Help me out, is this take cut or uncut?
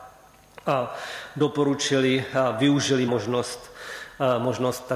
cut